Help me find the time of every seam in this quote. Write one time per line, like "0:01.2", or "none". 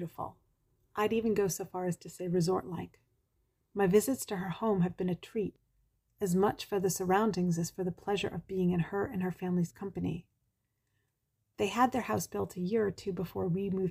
none